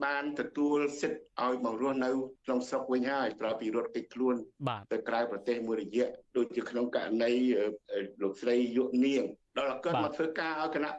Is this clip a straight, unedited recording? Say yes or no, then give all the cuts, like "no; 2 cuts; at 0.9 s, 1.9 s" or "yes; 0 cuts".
no; 1 cut; at 4.5 s